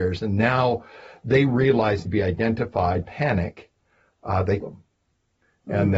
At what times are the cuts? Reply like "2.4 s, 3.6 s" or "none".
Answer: 2.1 s, 3.0 s, 4.6 s

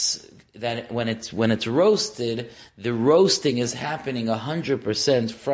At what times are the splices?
none

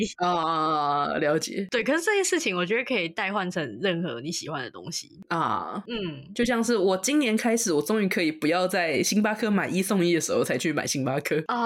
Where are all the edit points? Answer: none

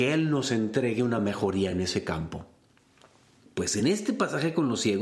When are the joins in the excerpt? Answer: none

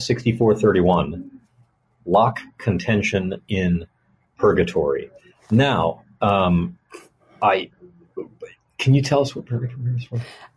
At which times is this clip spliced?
none

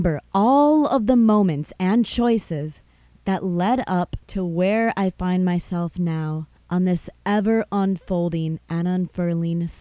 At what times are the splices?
4.2 s, 6.6 s

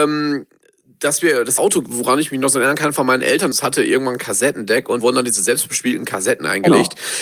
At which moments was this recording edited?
1.6 s, 3.5 s, 5.0 s

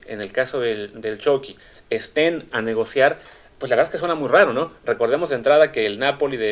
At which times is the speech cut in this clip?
2.5 s

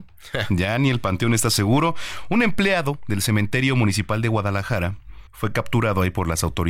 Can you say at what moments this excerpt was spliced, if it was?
5.3 s

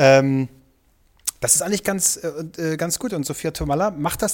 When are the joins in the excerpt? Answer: none

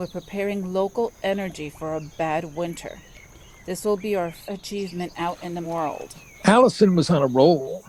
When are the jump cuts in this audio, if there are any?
4.4 s, 5.6 s

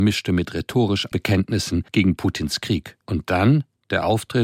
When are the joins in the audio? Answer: 1.1 s, 1.9 s, 3.0 s

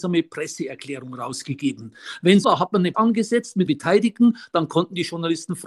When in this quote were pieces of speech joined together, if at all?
2.4 s, 2.9 s, 3.7 s

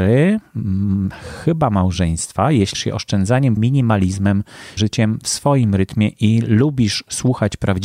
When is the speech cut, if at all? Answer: 2.7 s, 3.6 s, 4.8 s

